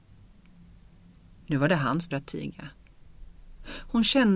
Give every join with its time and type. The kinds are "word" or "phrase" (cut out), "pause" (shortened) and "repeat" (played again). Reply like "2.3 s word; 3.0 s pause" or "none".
2.1 s word